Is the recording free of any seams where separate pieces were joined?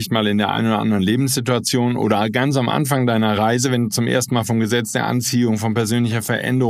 yes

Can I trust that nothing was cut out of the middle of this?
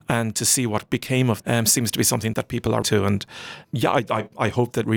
no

